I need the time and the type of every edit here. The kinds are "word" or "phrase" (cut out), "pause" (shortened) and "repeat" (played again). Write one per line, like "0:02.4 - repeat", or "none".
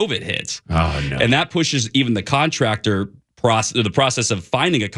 none